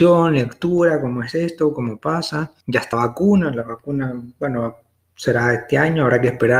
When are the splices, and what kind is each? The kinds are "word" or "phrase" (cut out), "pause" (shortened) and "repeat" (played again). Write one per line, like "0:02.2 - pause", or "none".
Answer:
0:02.6 - pause
0:02.9 - word